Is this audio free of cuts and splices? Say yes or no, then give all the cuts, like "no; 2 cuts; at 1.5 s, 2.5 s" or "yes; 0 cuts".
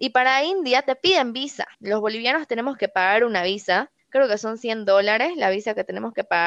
no; 2 cuts; at 1.7 s, 4.0 s